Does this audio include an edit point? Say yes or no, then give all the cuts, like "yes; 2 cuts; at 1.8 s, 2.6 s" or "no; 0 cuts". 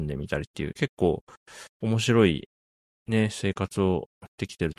no; 0 cuts